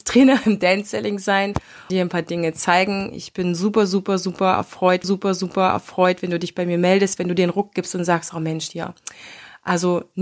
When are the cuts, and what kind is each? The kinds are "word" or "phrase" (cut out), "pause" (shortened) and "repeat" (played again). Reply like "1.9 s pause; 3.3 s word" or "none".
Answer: 1.9 s word; 5.0 s repeat